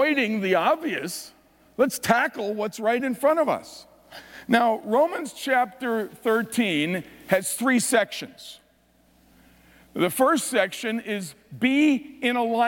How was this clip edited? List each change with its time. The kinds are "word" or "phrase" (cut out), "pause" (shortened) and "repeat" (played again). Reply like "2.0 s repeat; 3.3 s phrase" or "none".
none